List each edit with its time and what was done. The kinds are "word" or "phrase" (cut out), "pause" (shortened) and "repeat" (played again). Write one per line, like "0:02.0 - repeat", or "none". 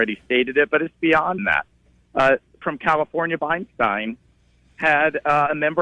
0:01.4 - word
0:02.6 - word
0:03.4 - word